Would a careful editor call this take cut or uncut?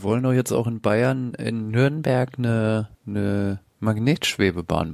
cut